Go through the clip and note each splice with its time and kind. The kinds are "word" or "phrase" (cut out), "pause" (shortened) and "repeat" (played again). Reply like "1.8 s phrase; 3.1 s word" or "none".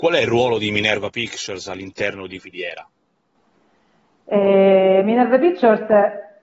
2.4 s word

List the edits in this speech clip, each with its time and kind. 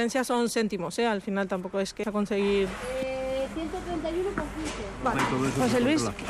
2.0 s word; 5.1 s word

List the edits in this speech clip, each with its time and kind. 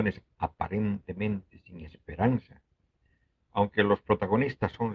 none

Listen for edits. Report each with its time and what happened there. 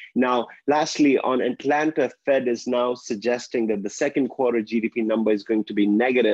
none

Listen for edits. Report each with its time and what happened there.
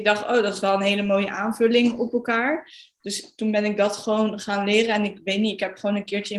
none

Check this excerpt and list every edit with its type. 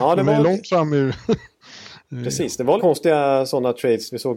2.8 s word

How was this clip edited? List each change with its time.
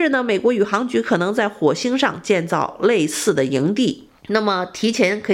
4.2 s pause

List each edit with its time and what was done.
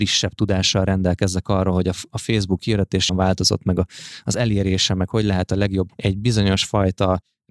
3.1 s phrase; 5.9 s word

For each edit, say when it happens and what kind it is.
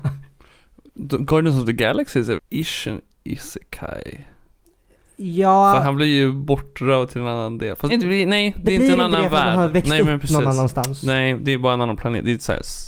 2.4 s word; 7.9 s phrase

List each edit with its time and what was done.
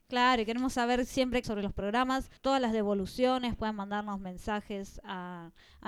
1.4 s phrase; 2.4 s pause

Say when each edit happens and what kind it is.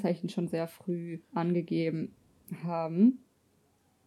1.2 s pause

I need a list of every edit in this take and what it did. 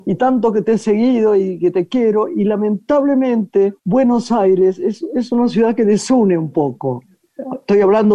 3.8 s pause

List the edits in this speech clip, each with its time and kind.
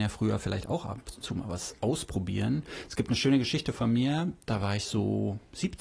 none

